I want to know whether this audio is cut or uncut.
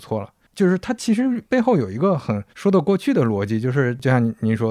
cut